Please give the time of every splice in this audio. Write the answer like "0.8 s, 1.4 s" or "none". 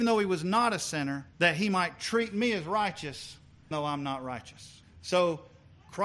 1.3 s, 3.7 s, 4.8 s